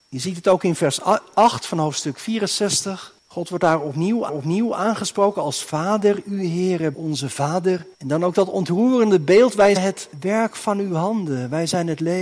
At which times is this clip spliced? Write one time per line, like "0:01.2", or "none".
0:03.2
0:04.3
0:06.9
0:07.9
0:09.8
0:10.1